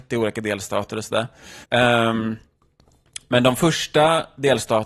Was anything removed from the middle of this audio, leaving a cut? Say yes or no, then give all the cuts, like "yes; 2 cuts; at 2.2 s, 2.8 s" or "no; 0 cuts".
yes; 1 cut; at 1.6 s